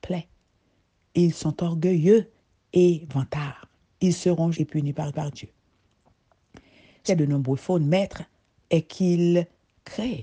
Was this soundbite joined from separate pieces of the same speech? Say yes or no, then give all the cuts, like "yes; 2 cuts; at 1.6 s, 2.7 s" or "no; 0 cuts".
yes; 4 cuts; at 3.8 s, 4.5 s, 5.1 s, 7.1 s